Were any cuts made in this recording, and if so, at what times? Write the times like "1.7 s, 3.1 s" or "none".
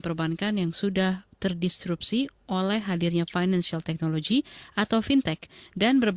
none